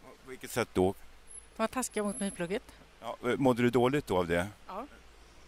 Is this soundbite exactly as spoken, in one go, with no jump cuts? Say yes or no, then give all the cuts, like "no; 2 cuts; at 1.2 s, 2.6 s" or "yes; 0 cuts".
yes; 0 cuts